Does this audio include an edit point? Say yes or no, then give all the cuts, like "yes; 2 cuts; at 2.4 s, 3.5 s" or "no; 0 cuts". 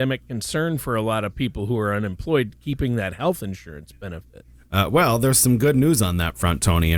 no; 0 cuts